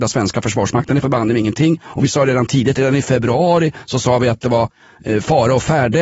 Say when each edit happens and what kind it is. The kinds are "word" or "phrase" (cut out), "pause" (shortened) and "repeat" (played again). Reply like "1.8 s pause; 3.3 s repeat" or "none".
1.0 s word